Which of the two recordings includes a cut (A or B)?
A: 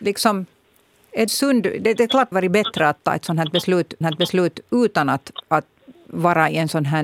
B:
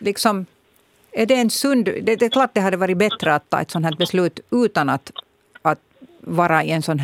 A